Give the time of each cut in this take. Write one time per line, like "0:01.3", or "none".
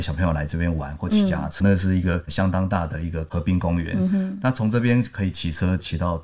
0:01.6